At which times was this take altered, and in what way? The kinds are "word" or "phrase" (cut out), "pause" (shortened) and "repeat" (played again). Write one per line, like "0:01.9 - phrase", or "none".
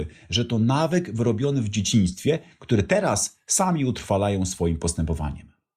none